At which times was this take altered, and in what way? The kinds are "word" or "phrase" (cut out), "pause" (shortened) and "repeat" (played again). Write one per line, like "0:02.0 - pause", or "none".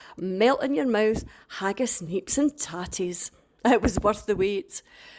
none